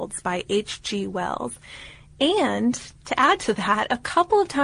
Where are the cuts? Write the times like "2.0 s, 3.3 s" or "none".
none